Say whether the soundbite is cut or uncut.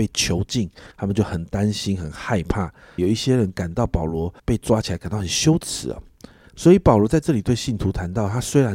cut